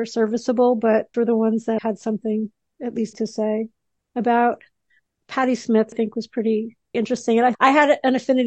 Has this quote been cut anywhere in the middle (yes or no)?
yes